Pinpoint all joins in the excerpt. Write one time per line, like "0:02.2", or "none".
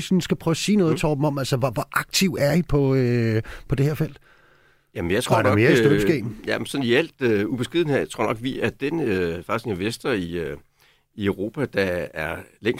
none